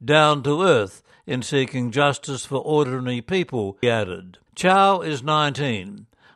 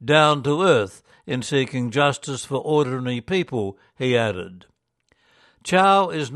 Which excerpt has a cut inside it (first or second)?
first